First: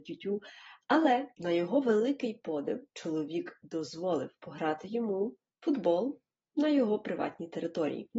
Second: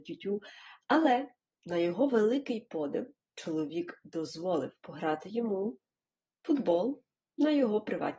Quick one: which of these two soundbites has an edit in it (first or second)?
first